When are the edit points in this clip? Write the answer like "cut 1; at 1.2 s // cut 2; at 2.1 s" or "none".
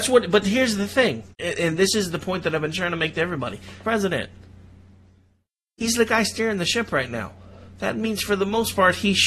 cut 1; at 1.3 s // cut 2; at 3.8 s